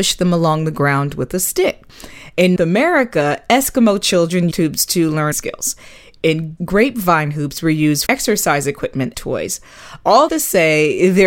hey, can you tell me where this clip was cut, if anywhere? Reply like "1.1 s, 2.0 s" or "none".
2.6 s, 4.5 s, 5.3 s, 6.6 s, 8.1 s, 9.1 s, 10.3 s

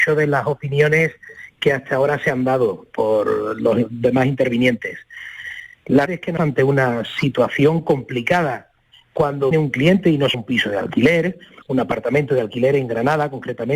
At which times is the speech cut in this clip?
6.1 s, 6.4 s, 9.5 s, 10.3 s

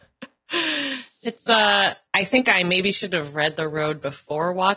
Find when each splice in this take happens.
2.1 s

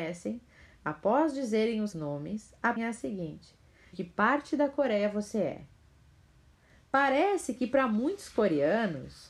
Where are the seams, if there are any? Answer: 1.9 s, 2.8 s, 3.9 s

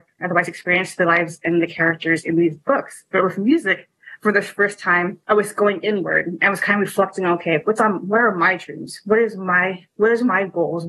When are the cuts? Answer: 5.2 s

